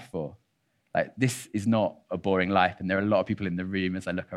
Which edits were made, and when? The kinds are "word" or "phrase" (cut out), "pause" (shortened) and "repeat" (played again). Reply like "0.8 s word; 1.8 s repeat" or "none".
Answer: none